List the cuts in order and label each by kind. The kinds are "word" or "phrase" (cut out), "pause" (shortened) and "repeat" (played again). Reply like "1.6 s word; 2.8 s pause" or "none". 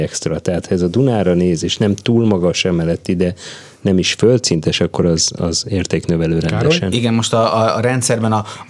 none